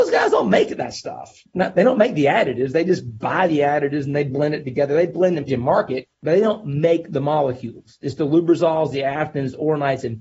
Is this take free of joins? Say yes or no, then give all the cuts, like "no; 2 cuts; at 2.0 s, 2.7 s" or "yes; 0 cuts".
no; 2 cuts; at 5.5 s, 6.1 s